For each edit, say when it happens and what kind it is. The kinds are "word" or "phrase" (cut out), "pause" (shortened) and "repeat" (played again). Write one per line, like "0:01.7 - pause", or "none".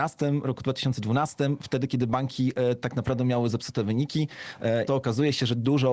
0:04.9 - phrase